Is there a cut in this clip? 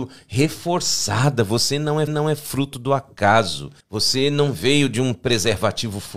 yes; 2 cuts; at 2.1 s, 3.8 s

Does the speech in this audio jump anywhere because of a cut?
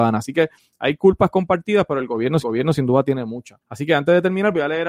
yes; 2 cuts; at 2.4 s, 3.6 s

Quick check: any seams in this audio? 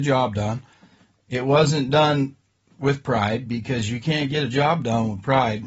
no; 0 cuts

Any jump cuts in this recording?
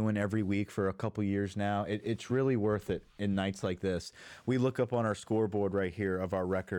no; 0 cuts

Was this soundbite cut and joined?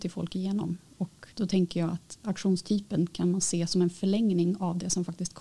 yes; 1 cut; at 1.3 s

